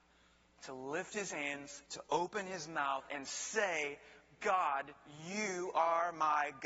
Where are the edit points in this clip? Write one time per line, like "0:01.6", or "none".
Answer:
0:01.9